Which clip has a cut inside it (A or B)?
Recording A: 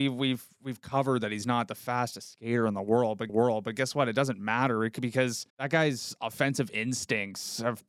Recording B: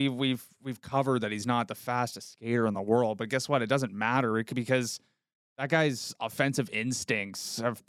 A